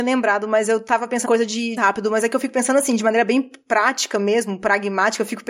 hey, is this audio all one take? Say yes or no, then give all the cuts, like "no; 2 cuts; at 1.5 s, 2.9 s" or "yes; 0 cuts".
no; 2 cuts; at 1.2 s, 1.8 s